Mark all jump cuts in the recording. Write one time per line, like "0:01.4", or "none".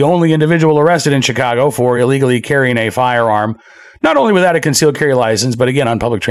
none

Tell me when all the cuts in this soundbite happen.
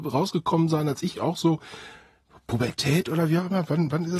0:01.1

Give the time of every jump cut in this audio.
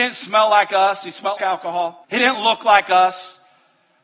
0:01.4
0:02.0

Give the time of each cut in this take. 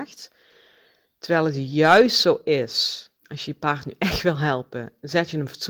0:03.2

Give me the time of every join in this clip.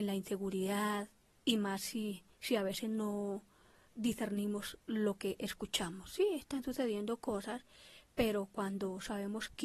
0:01.3
0:02.3

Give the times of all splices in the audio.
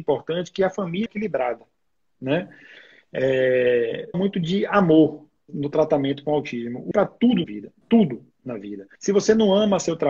0:01.1
0:04.1
0:05.5
0:06.9
0:07.4
0:07.8
0:09.0

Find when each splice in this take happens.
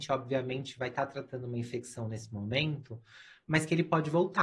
none

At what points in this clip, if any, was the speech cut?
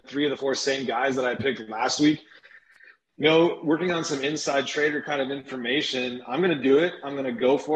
none

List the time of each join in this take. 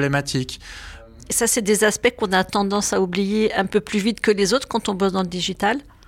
none

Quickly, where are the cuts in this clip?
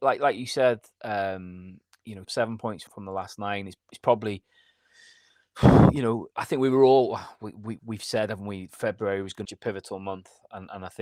0:02.2
0:02.9
0:06.3
0:07.8
0:09.4

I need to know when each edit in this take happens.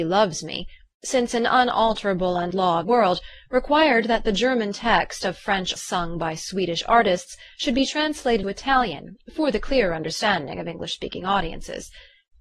0:02.5
0:02.8
0:05.8
0:08.4

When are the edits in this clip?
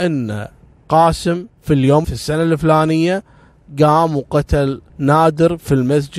0:01.5
0:02.0
0:04.9

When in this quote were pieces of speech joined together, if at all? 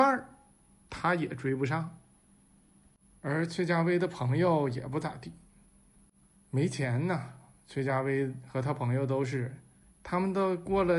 none

